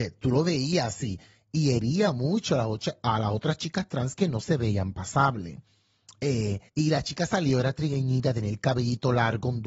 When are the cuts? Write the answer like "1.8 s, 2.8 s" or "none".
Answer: 6.7 s